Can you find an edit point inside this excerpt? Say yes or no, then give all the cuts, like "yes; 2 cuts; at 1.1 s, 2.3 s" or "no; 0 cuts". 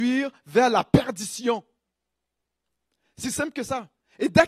yes; 1 cut; at 3.2 s